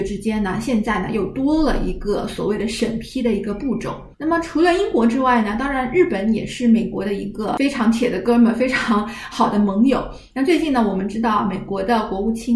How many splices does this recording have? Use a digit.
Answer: 1